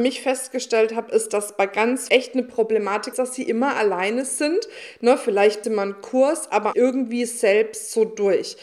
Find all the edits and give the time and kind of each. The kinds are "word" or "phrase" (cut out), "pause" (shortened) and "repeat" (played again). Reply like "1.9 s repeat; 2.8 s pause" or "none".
2.1 s word; 3.1 s word; 5.6 s phrase; 6.7 s phrase